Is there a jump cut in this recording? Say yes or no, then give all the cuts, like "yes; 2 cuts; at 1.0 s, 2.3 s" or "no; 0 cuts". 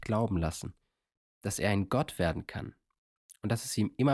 no; 0 cuts